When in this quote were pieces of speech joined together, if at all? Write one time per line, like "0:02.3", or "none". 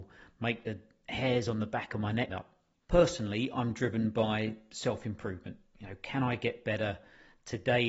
0:02.3